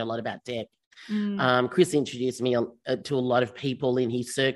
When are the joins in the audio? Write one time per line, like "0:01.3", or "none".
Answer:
none